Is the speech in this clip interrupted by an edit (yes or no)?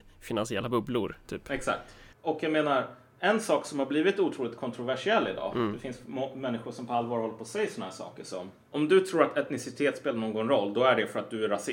yes